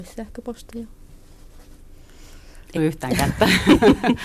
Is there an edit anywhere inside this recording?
yes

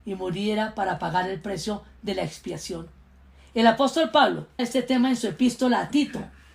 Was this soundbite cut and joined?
yes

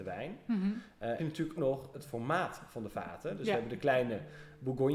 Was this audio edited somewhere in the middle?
yes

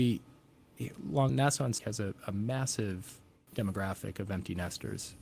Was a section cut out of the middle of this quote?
yes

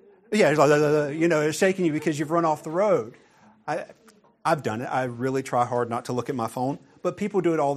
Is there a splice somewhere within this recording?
no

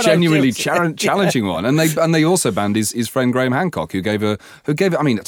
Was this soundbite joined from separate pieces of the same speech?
no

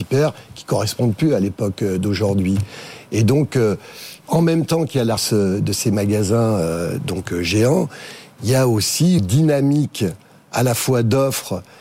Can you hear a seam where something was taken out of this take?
yes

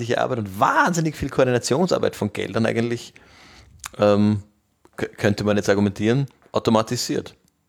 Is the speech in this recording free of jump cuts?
yes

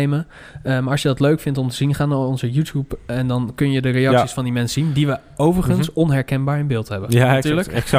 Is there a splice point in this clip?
no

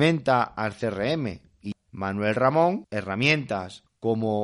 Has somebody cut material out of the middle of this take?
yes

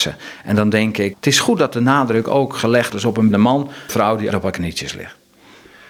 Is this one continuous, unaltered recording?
no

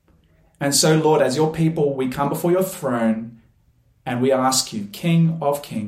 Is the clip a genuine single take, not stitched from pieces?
yes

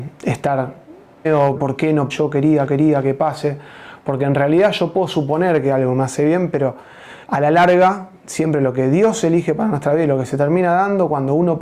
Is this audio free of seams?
no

